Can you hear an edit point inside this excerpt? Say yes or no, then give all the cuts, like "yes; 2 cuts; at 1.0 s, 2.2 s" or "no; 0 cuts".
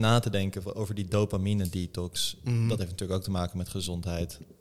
no; 0 cuts